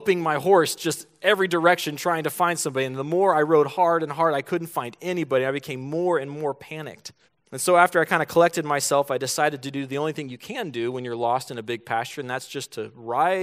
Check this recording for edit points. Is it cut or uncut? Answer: cut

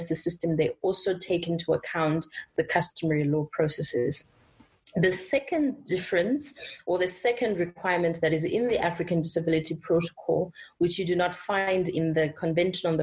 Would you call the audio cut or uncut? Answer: uncut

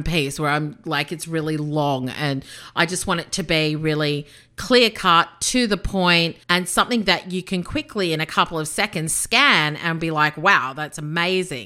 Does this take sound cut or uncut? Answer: cut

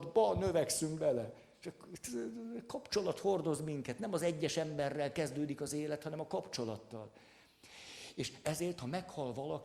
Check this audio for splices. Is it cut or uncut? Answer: uncut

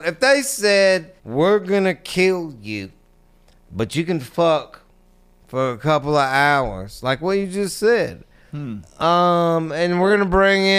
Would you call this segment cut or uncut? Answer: cut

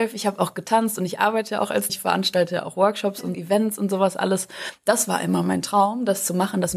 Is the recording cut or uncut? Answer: cut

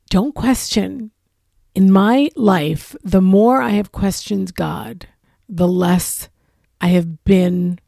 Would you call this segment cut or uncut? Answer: uncut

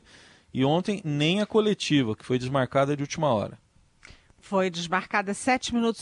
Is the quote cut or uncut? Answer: uncut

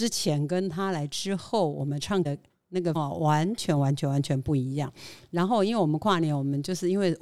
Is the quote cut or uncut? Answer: cut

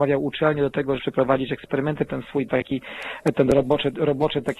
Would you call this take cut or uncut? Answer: cut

